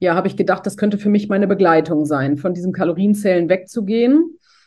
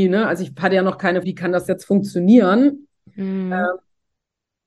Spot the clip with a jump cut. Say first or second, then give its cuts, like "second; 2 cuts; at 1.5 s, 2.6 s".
second; 1 cut; at 1.2 s